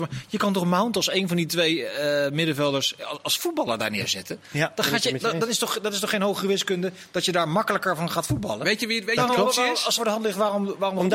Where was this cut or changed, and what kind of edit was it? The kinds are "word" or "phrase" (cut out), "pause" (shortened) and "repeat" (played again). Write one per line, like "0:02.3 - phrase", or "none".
0:10.0 - phrase